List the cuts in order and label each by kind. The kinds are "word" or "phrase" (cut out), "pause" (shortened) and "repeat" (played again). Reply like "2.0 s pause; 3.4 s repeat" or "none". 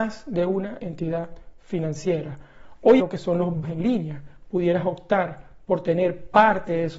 3.0 s phrase; 3.6 s word